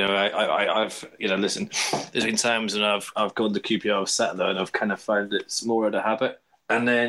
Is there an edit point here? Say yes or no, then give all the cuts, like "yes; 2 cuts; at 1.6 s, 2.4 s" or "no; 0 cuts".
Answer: no; 0 cuts